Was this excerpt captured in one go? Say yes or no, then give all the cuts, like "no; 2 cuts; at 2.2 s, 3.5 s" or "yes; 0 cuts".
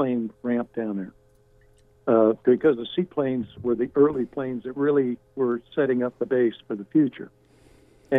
yes; 0 cuts